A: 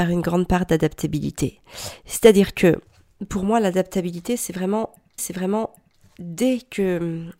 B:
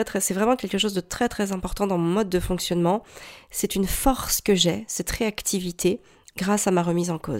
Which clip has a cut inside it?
A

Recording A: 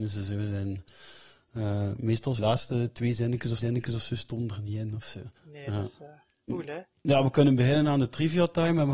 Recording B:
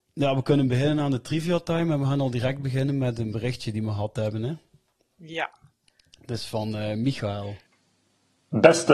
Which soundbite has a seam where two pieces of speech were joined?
A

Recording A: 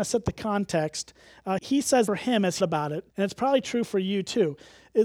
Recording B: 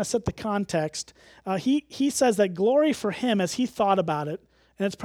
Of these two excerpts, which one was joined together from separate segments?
A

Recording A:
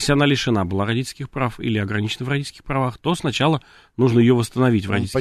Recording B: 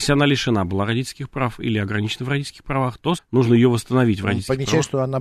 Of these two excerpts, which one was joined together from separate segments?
B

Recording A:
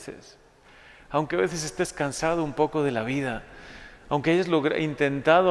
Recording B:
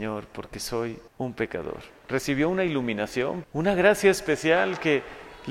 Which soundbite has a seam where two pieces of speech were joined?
B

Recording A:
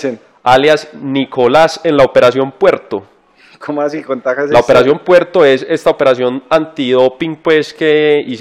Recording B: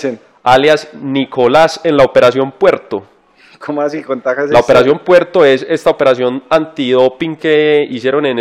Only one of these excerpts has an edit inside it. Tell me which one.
B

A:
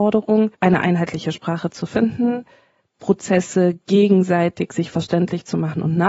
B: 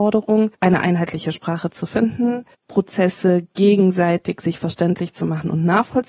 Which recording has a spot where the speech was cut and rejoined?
B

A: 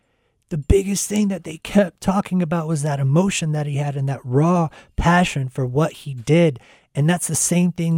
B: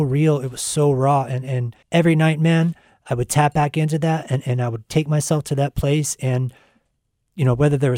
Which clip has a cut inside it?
B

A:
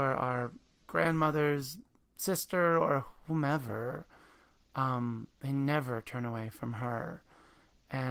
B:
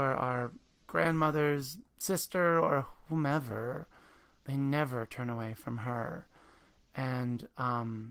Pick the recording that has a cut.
B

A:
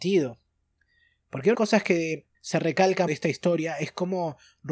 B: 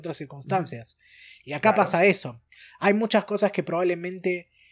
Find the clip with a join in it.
A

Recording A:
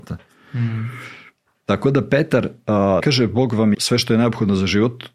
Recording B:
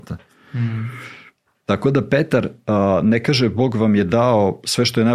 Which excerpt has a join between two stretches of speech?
A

